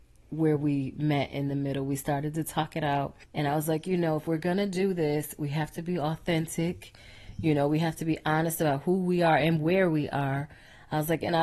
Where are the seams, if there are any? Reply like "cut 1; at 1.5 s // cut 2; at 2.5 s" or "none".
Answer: cut 1; at 3.2 s